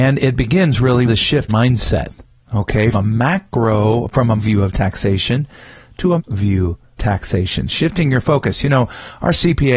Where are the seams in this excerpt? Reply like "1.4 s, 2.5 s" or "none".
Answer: 1.1 s, 1.5 s, 2.9 s, 4.4 s, 6.2 s, 7.0 s